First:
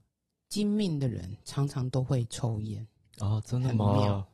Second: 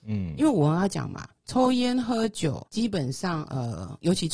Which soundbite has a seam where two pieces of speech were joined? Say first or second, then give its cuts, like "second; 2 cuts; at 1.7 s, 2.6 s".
second; 1 cut; at 2.7 s